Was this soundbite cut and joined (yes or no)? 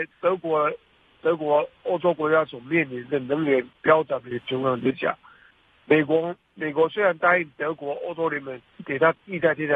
yes